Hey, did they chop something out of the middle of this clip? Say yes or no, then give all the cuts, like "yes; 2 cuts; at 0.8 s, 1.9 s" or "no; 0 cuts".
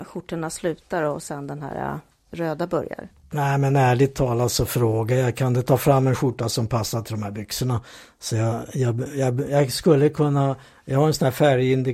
no; 0 cuts